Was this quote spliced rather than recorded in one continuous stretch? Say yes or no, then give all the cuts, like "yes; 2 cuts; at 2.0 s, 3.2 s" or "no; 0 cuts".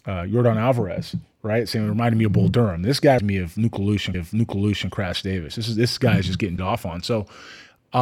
yes; 3 cuts; at 3.2 s, 4.1 s, 6.6 s